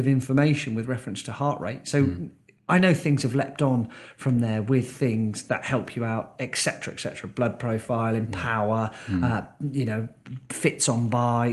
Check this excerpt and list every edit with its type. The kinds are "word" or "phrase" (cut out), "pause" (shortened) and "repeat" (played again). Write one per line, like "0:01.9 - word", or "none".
none